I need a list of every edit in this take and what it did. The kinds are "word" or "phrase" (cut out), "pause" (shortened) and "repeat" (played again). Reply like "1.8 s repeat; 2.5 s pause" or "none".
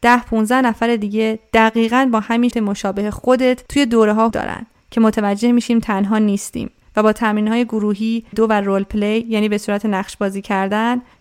2.5 s word; 3.7 s pause; 4.3 s word; 8.3 s phrase